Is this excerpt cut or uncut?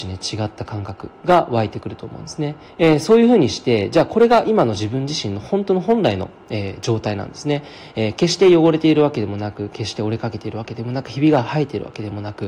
cut